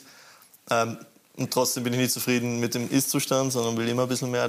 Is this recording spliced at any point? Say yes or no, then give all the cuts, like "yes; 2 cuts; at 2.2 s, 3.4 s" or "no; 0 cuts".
no; 0 cuts